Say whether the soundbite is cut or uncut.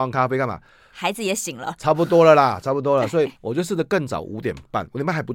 cut